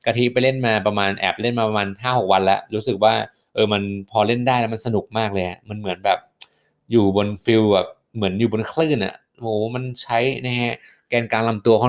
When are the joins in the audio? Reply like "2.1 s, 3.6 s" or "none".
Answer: none